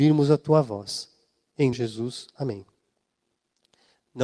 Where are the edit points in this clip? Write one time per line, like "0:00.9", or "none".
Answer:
0:01.7

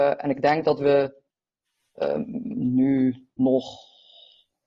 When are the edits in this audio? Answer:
none

